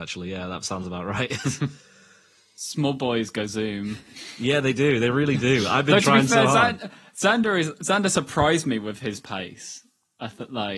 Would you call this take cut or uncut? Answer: uncut